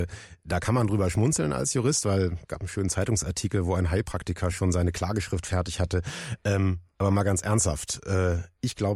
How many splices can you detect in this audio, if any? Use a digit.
0